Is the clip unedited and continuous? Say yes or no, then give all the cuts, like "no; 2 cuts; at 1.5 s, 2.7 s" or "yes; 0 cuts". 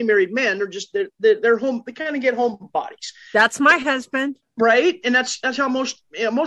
yes; 0 cuts